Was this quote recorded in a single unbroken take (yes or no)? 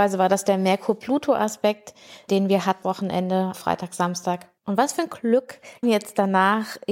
no